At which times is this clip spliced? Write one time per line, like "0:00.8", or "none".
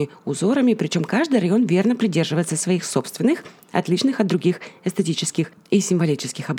none